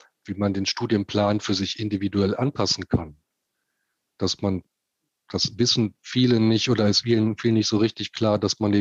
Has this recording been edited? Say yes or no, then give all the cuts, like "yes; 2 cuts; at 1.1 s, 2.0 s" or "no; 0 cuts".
no; 0 cuts